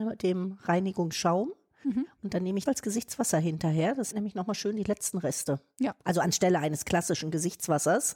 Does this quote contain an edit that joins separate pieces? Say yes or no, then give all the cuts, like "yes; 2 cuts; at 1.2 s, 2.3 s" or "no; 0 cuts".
yes; 2 cuts; at 2.7 s, 4.1 s